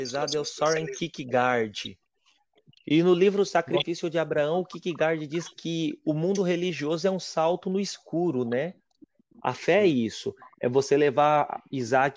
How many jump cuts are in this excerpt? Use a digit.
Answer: 0